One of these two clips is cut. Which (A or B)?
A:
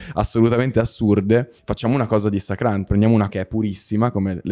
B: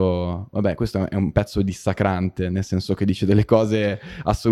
A